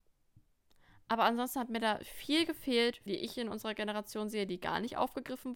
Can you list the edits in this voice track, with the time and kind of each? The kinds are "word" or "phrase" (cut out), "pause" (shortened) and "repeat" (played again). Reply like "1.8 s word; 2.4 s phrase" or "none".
3.1 s phrase

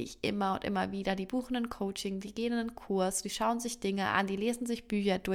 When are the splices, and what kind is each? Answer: none

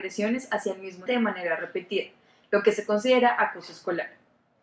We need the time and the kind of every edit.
1.1 s word

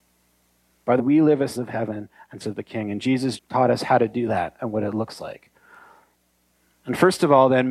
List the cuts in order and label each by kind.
1.0 s word; 1.6 s word; 2.4 s word; 3.4 s word

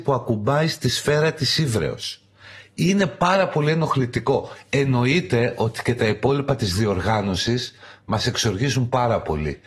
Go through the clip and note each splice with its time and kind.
none

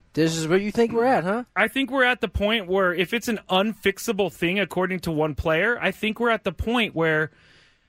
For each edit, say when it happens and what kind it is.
none

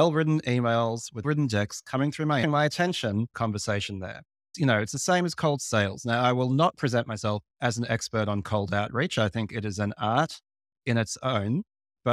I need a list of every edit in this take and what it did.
1.2 s word; 2.4 s phrase; 3.3 s phrase; 7.5 s pause

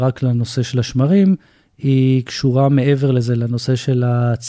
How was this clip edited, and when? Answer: none

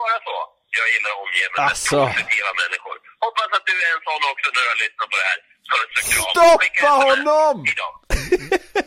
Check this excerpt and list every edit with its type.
none

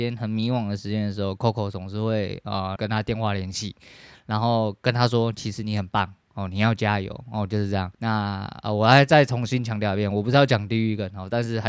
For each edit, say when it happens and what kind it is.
2.8 s word; 7.9 s pause

